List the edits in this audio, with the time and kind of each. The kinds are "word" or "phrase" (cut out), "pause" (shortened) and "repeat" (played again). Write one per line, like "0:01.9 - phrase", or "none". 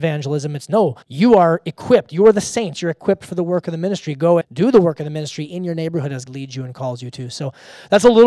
0:01.0 - pause
0:04.4 - word
0:06.3 - word